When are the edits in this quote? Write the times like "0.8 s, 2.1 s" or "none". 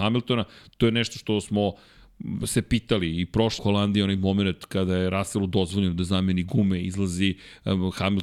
3.6 s